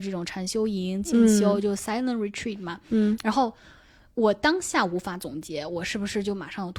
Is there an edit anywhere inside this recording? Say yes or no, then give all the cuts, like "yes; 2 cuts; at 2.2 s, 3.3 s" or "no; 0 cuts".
no; 0 cuts